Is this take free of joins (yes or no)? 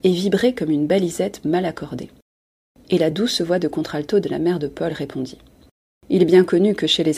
yes